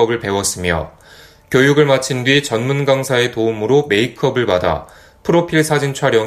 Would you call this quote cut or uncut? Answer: uncut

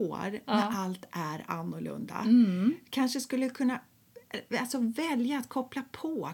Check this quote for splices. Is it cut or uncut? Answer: uncut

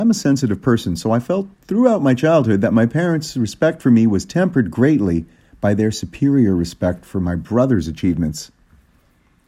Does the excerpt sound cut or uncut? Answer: cut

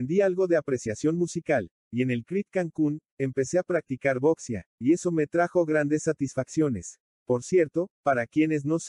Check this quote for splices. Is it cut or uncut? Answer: cut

